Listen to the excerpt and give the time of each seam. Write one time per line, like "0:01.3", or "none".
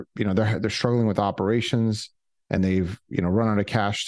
none